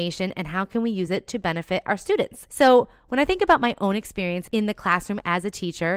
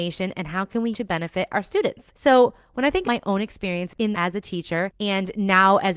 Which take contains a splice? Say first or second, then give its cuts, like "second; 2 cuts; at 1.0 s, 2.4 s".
second; 3 cuts; at 0.9 s, 3.0 s, 4.1 s